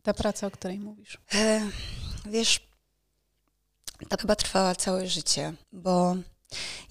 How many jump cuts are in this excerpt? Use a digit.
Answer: 3